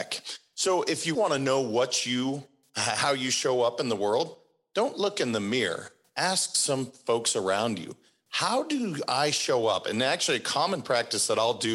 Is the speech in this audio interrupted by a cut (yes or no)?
yes